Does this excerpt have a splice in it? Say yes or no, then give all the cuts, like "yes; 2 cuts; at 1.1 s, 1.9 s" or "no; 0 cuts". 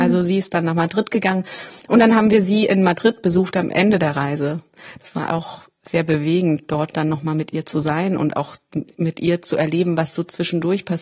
yes; 1 cut; at 5.3 s